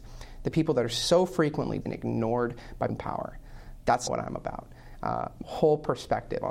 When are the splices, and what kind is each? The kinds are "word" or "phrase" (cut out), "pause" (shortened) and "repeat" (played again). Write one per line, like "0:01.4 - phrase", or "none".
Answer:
0:01.8 - word
0:02.9 - word
0:04.1 - word
0:05.4 - word